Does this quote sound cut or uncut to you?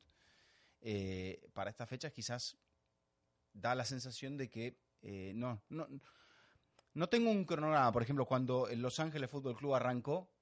uncut